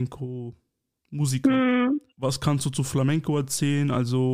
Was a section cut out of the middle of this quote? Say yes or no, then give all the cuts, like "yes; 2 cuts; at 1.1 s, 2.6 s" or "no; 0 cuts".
yes; 1 cut; at 2.1 s